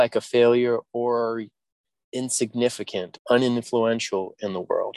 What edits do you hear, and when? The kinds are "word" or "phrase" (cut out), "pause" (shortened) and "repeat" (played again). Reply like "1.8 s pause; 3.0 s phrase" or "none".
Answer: 3.2 s word